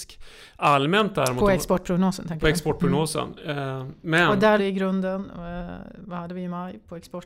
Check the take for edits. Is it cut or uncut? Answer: cut